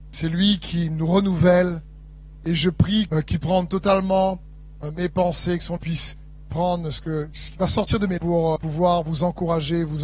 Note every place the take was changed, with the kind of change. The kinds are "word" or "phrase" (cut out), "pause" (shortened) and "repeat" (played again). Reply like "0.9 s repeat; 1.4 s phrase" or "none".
3.1 s word; 3.4 s word; 5.8 s word; 8.2 s word; 8.6 s word